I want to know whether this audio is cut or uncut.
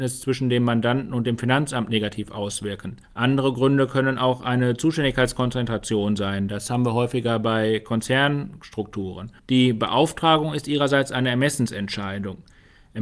cut